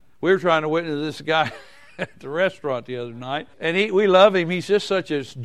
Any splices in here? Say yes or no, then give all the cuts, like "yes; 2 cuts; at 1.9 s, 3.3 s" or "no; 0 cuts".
yes; 1 cut; at 3.5 s